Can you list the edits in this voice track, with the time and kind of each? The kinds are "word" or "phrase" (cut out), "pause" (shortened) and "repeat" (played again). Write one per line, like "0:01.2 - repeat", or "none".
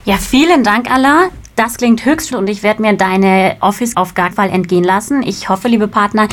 0:02.3 - word
0:03.9 - word
0:04.3 - word